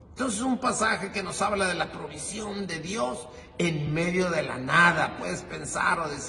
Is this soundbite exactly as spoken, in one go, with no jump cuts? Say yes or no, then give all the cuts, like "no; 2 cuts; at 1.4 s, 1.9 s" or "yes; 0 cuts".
yes; 0 cuts